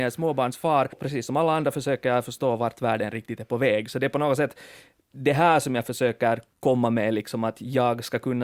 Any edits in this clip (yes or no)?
yes